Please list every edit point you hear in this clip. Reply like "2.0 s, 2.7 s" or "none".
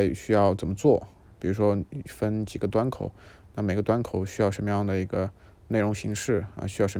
none